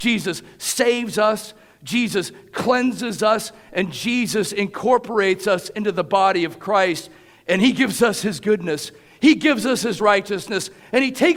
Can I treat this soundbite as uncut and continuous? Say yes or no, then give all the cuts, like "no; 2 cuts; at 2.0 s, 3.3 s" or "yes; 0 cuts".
yes; 0 cuts